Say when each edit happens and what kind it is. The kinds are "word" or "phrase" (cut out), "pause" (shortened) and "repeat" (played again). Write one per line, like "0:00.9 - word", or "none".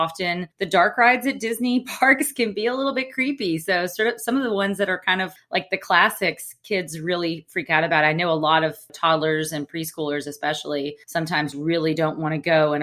0:11.5 - word